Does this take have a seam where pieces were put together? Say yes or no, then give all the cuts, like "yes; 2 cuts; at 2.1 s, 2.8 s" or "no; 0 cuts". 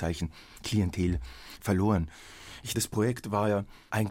yes; 1 cut; at 2.7 s